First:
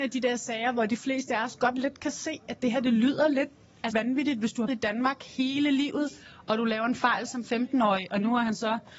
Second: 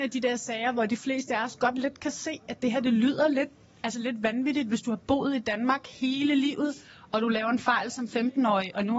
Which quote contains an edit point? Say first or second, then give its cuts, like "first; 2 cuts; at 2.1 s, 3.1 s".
first; 2 cuts; at 3.9 s, 4.7 s